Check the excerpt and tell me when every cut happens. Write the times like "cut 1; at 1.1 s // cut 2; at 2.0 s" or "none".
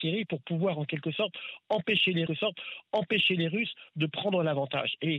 cut 1; at 2.3 s